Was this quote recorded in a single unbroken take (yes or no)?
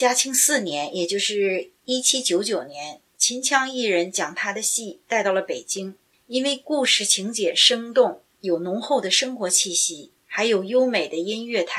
no